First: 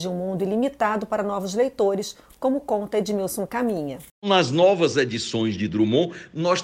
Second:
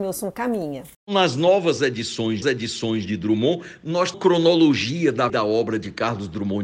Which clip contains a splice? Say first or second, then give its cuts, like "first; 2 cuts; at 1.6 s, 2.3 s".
second; 3 cuts; at 2.4 s, 4.1 s, 5.3 s